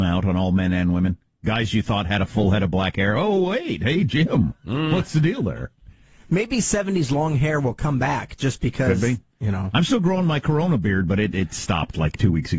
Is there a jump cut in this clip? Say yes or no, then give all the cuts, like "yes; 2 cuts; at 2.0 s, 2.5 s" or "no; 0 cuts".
no; 0 cuts